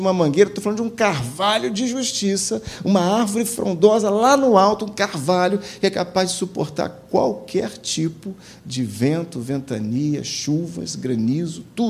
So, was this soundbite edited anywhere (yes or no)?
no